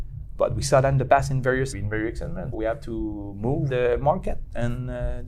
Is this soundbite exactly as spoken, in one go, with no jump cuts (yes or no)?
no